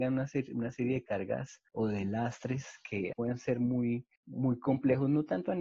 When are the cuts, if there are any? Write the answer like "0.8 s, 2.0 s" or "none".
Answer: 1.7 s, 3.1 s, 4.2 s

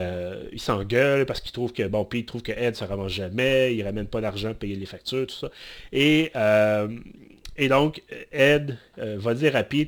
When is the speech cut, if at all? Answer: none

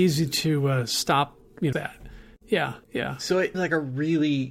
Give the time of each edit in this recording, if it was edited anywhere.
1.7 s, 2.8 s, 3.5 s

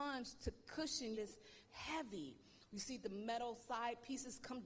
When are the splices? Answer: 1.1 s, 1.6 s

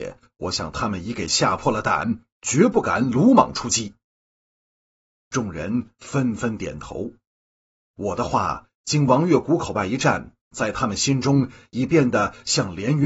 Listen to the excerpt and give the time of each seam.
none

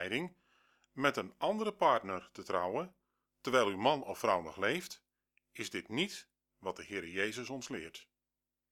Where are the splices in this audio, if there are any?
none

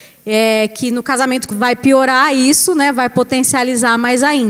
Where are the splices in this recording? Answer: 1.5 s

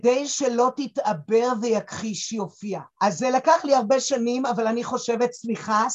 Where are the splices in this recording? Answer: 2.9 s

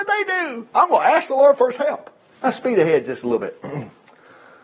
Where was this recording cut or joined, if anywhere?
2.3 s

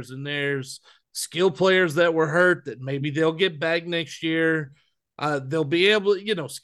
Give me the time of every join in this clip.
none

